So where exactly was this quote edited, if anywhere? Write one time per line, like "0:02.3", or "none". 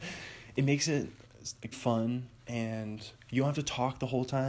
0:01.7
0:02.4